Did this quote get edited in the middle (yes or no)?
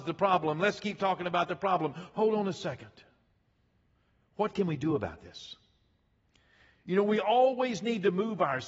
no